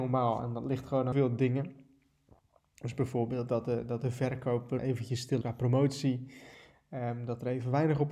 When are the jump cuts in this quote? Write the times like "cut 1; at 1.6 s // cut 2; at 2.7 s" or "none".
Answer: cut 1; at 1.1 s // cut 2; at 4.8 s // cut 3; at 5.4 s